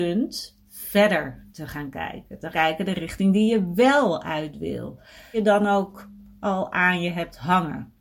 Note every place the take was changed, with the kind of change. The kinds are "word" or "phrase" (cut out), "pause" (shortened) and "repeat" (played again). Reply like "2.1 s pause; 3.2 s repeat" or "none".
1.5 s pause; 2.5 s word; 5.3 s phrase

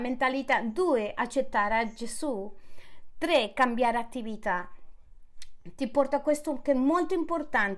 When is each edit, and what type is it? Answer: none

